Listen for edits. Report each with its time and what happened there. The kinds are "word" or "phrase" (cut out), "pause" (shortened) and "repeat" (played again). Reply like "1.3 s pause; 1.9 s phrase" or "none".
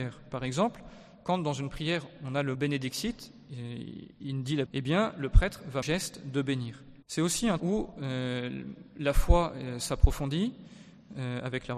2.5 s word; 4.7 s word; 5.8 s phrase; 7.0 s pause; 7.6 s word